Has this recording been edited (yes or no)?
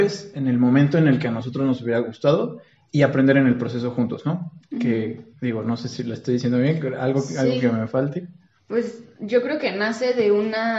no